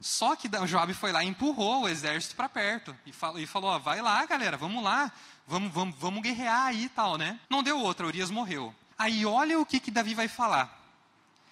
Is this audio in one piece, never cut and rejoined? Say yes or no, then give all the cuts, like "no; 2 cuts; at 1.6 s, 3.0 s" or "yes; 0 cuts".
no; 2 cuts; at 7.4 s, 8.9 s